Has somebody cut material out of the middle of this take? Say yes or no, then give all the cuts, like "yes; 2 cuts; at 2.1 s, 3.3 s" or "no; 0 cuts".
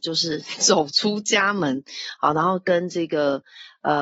no; 0 cuts